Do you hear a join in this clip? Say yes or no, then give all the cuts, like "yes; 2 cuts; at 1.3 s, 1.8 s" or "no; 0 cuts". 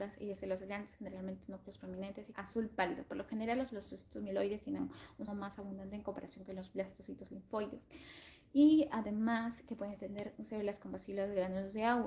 yes; 2 cuts; at 2.3 s, 5.3 s